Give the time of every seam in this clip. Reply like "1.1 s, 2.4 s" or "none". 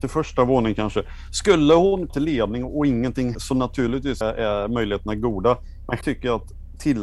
2.1 s, 3.3 s, 4.2 s, 6.0 s